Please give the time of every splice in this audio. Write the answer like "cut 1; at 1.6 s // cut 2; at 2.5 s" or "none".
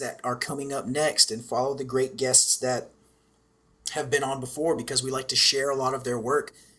none